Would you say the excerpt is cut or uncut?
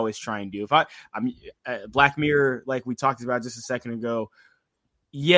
uncut